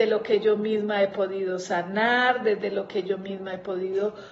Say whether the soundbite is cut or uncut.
uncut